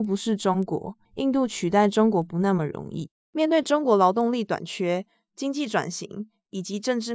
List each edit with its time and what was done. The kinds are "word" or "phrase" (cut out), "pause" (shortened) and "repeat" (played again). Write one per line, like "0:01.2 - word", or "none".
0:01.0 - pause
0:03.2 - pause